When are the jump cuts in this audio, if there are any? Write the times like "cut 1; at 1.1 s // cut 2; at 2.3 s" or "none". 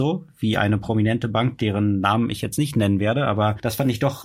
none